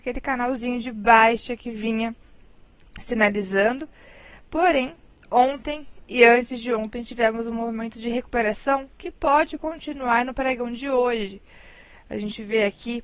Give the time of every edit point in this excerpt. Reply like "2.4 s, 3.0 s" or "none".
none